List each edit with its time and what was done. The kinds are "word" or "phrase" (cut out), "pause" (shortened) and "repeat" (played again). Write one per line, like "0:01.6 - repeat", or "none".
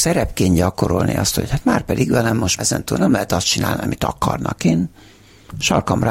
0:02.6 - word